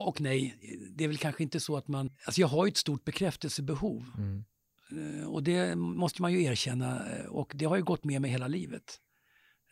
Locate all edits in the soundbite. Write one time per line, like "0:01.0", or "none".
0:02.1